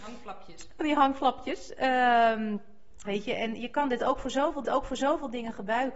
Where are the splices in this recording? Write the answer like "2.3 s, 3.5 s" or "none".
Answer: 3.0 s, 4.6 s